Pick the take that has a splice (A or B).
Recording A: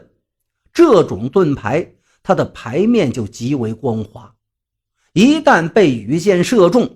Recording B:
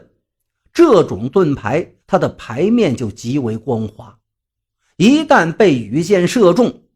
B